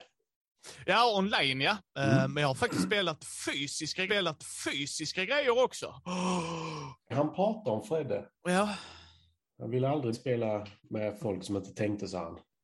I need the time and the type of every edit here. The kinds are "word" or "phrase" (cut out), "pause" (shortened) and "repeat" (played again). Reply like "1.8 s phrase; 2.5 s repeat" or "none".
1.9 s pause; 4.1 s repeat; 7.1 s phrase; 8.3 s pause; 10.1 s word; 10.8 s pause

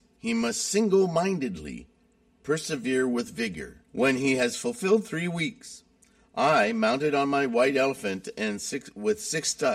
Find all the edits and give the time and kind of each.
3.9 s pause

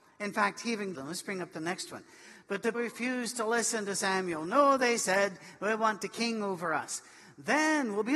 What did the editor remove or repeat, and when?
0.9 s phrase; 2.7 s word

